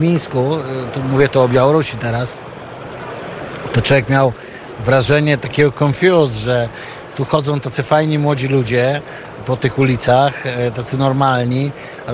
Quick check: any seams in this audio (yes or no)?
no